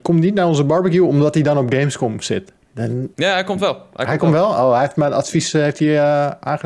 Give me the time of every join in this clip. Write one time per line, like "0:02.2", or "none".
0:03.1